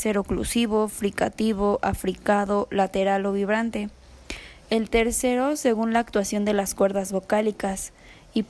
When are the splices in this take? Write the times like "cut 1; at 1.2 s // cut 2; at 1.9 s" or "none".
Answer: none